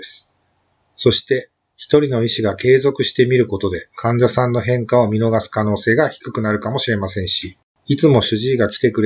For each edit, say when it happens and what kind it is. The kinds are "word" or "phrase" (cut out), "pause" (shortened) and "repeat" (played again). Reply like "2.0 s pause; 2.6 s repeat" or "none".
7.7 s pause